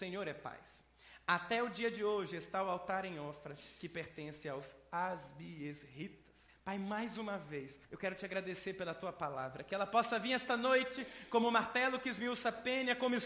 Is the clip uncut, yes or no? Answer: no